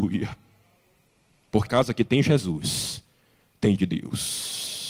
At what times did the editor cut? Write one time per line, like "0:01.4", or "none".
0:01.7
0:03.8

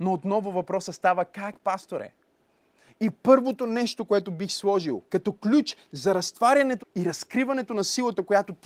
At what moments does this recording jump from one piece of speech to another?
0:05.1
0:06.8

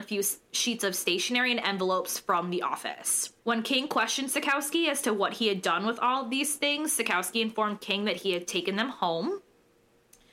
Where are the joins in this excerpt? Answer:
0:03.4

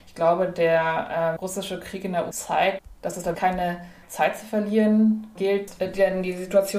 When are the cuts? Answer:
0:01.4
0:02.3
0:03.3
0:05.4

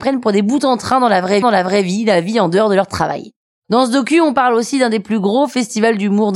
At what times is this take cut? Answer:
0:01.4

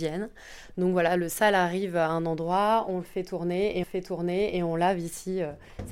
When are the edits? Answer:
0:03.8

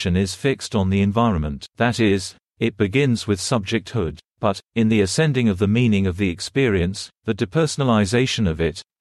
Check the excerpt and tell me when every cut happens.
0:01.7
0:04.3
0:07.2

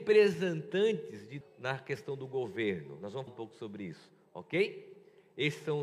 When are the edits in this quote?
0:01.4
0:03.3

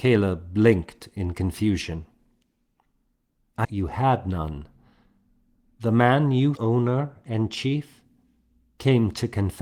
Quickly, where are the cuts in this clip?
0:03.6
0:06.6

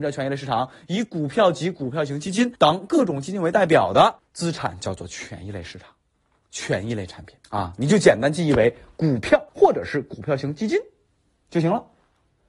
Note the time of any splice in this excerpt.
0:02.6
0:04.2
0:07.4
0:09.5

